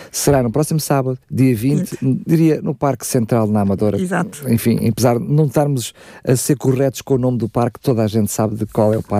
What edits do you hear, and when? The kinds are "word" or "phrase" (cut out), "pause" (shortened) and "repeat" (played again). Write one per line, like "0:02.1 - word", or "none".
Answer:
0:01.2 - pause